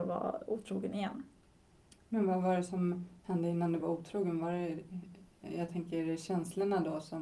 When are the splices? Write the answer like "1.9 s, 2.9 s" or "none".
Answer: 3.8 s